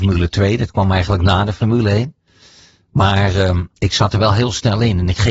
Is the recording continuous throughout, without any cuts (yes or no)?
yes